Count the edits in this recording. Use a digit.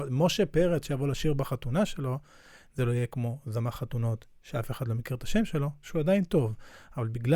0